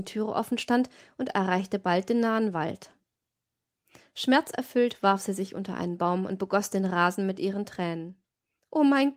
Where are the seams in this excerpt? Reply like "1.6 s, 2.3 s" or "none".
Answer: none